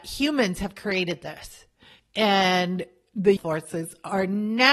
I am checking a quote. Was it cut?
yes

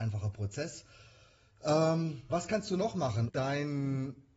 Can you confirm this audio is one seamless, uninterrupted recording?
no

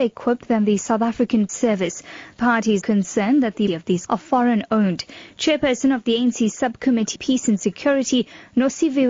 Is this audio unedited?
no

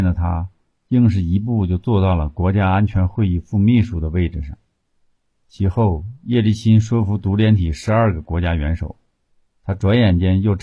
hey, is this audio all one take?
yes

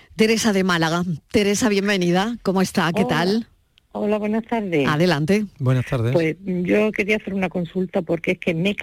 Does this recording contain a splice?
no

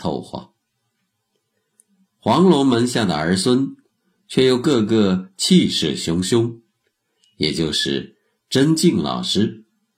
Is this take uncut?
yes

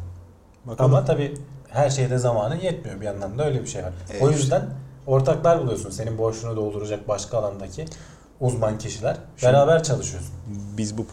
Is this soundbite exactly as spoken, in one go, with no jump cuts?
no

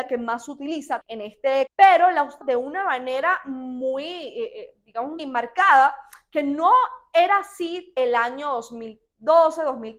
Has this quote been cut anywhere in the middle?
yes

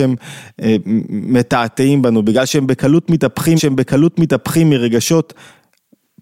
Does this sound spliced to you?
yes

